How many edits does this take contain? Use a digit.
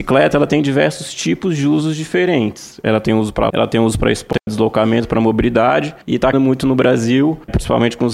3